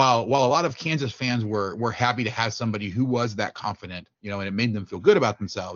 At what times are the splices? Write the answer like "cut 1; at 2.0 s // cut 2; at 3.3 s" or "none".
cut 1; at 4.1 s